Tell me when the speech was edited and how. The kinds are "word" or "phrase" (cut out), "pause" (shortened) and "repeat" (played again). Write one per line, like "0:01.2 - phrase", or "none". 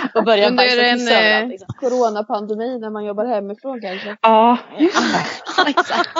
none